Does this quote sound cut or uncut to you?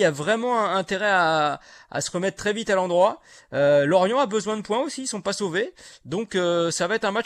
uncut